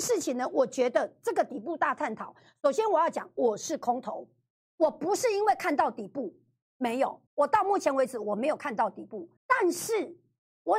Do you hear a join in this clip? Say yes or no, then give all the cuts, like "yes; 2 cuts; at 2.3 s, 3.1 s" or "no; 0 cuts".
yes; 3 cuts; at 4.6 s, 7.3 s, 9.4 s